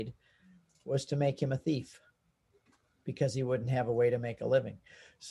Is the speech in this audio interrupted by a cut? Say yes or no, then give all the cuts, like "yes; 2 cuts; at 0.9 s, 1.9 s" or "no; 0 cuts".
no; 0 cuts